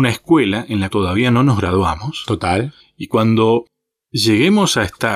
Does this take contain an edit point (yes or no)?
yes